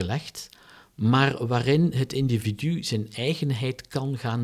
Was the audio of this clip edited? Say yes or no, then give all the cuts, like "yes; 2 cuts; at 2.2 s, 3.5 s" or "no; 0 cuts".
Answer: no; 0 cuts